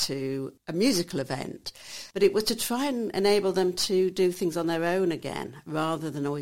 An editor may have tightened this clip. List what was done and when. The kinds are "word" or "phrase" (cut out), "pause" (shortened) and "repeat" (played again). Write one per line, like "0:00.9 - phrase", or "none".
0:02.1 - pause